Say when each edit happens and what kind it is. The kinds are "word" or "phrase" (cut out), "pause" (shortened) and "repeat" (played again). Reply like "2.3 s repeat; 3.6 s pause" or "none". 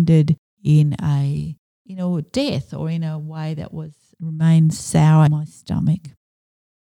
4.1 s word; 5.3 s word